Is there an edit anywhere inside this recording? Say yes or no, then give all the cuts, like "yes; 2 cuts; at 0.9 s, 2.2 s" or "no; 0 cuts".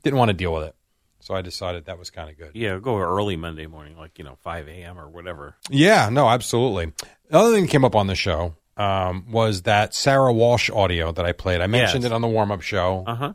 yes; 1 cut; at 5.6 s